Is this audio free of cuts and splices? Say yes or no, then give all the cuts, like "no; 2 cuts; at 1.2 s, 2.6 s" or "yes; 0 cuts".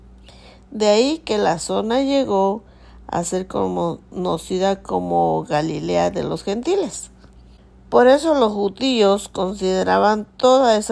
yes; 0 cuts